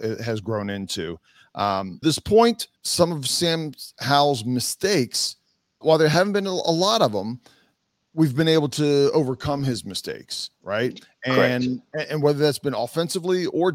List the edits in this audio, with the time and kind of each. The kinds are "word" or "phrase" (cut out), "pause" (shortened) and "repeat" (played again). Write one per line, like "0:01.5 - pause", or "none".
0:02.0 - phrase
0:02.8 - pause
0:05.8 - word